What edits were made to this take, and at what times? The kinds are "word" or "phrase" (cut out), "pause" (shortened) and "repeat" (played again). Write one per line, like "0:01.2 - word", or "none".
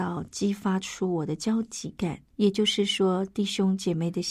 0:02.3 - pause